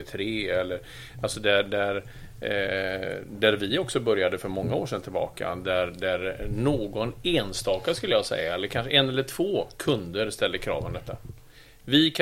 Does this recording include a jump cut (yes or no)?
no